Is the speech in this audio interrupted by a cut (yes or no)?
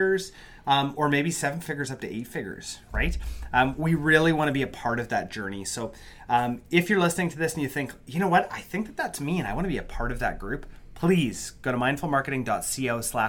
no